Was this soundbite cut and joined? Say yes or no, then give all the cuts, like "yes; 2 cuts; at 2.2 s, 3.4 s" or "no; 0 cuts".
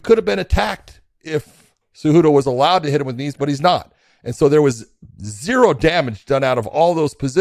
no; 0 cuts